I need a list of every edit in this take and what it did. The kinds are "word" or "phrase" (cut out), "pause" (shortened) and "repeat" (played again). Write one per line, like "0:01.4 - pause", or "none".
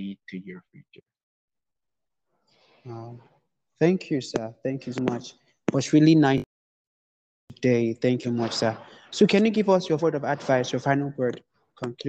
0:05.0 - word
0:08.2 - word
0:10.0 - word